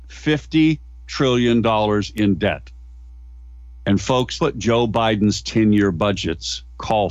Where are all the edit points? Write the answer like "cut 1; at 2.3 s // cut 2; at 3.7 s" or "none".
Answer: cut 1; at 4.4 s